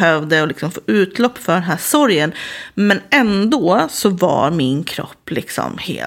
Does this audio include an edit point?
no; 0 cuts

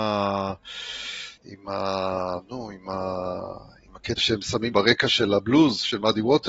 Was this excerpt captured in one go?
no; 3 cuts; at 1.4 s, 4.2 s, 4.7 s

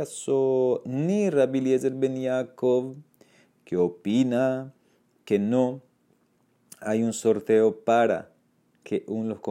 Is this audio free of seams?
yes; 0 cuts

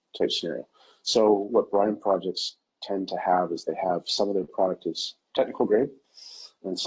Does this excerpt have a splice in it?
no; 0 cuts

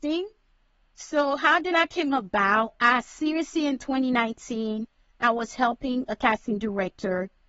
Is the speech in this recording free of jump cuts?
yes; 0 cuts

